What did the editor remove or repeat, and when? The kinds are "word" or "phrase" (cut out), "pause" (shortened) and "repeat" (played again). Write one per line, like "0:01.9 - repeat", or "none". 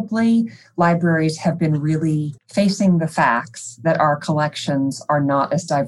0:02.4 - pause